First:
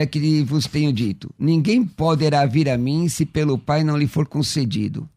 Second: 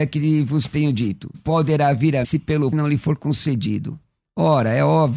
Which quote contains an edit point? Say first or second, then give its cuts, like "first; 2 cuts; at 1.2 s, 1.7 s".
second; 3 cuts; at 1.3 s, 2.2 s, 2.7 s